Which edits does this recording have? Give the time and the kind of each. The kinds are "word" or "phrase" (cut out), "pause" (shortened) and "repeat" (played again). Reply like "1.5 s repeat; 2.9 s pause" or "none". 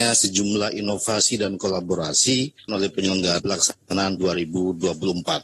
2.7 s phrase; 3.4 s word; 4.2 s word